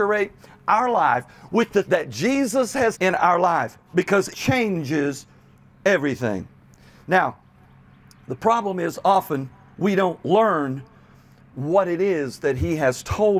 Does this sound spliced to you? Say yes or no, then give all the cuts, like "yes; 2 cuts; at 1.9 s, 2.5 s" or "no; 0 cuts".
yes; 3 cuts; at 1.8 s, 2.9 s, 4.3 s